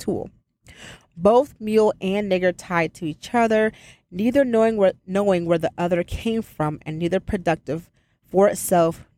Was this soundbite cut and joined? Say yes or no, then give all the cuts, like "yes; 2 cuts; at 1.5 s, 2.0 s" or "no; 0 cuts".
no; 0 cuts